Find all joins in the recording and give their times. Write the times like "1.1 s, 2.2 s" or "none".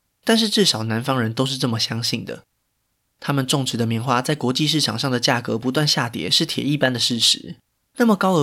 none